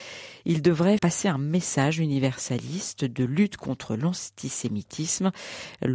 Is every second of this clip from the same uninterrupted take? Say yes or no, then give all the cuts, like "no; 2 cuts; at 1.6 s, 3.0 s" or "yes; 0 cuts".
no; 1 cut; at 1.0 s